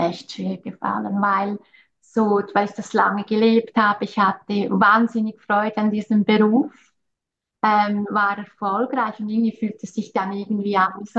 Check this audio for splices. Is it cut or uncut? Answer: uncut